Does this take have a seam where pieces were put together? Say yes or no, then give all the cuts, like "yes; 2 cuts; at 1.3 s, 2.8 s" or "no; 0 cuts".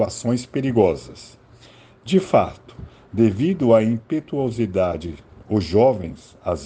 no; 0 cuts